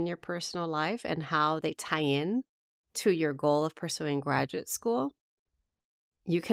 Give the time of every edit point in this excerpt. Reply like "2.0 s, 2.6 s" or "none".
none